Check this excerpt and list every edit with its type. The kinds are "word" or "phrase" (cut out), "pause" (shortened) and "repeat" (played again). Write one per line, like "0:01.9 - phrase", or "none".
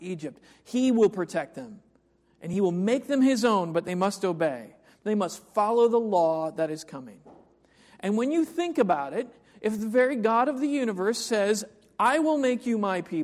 none